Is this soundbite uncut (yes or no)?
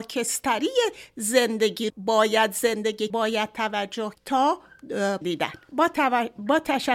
no